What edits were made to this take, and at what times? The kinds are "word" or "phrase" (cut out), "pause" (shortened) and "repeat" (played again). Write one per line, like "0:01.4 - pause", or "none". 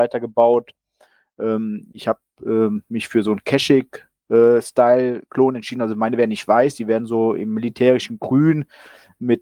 none